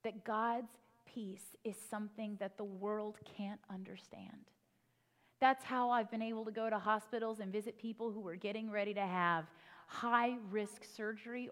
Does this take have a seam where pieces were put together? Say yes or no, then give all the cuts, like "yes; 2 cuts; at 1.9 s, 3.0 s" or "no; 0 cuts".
no; 0 cuts